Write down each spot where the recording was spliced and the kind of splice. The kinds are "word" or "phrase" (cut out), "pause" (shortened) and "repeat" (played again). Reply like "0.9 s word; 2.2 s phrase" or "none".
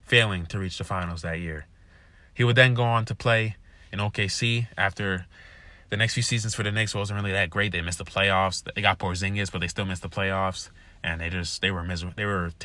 none